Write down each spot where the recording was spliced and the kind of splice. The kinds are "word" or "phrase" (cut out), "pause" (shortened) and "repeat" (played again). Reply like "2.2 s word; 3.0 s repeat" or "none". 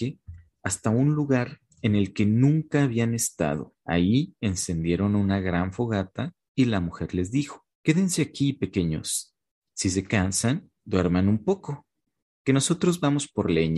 1.7 s pause; 3.8 s pause; 7.7 s pause; 10.8 s pause